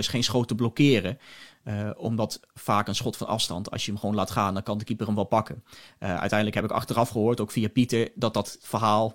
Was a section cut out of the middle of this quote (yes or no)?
no